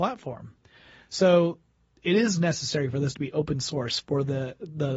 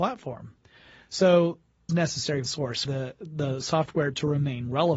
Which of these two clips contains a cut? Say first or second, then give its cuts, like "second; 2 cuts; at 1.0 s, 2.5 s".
second; 3 cuts; at 1.9 s, 2.5 s, 2.9 s